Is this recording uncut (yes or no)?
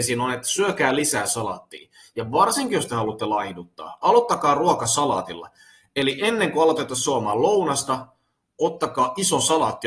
yes